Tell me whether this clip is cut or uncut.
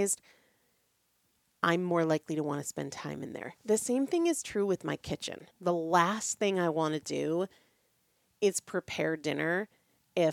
cut